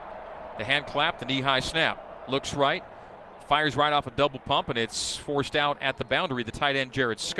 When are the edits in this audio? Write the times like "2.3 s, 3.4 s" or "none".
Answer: none